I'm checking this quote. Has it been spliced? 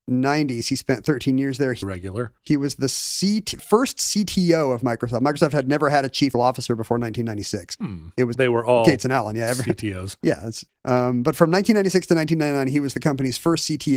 yes; 7 cuts; at 1.8 s, 2.4 s, 3.6 s, 6.3 s, 7.8 s, 8.3 s, 10.7 s

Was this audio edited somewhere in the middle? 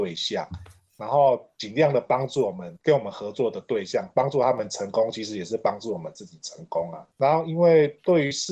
yes; 2 cuts; at 2.8 s, 7.1 s

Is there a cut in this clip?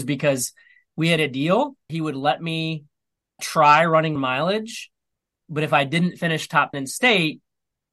yes; 6 cuts; at 1.2 s, 1.9 s, 3.4 s, 4.2 s, 5.4 s, 6.7 s

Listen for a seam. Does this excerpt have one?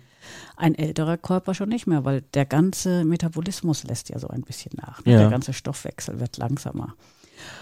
no; 0 cuts

